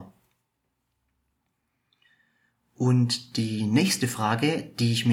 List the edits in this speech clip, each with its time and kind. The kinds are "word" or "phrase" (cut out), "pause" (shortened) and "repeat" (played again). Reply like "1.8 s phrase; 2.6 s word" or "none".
none